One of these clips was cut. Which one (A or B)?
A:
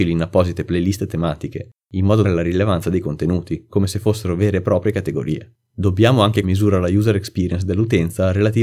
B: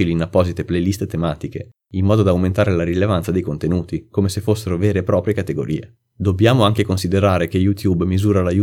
A